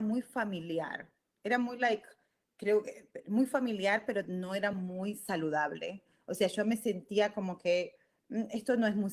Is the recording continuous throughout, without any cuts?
yes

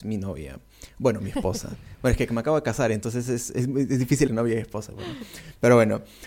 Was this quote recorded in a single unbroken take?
no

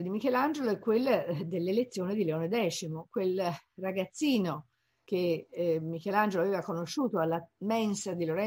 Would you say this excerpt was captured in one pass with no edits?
yes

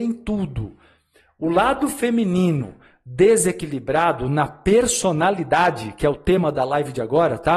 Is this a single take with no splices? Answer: yes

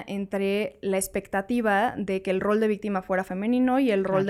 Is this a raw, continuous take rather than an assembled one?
yes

